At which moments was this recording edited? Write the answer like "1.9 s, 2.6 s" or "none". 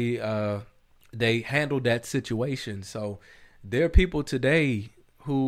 none